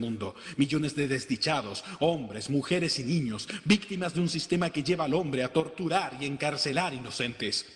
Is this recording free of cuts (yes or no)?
yes